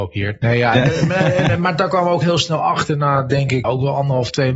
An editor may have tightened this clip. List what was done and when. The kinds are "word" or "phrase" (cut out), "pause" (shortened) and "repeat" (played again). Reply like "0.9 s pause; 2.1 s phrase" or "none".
3.6 s word